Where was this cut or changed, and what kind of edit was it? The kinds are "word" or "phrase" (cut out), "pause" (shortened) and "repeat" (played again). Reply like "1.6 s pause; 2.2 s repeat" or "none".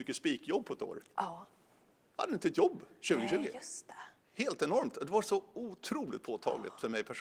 none